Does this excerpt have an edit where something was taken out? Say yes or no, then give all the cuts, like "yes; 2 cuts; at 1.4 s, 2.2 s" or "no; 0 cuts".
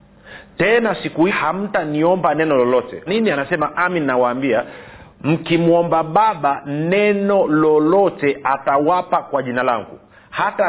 yes; 3 cuts; at 1.3 s, 3.1 s, 3.7 s